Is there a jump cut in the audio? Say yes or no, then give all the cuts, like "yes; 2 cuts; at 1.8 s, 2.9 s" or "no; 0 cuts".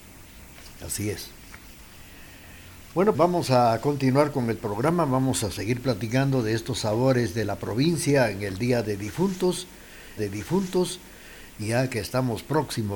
yes; 2 cuts; at 3.1 s, 10.2 s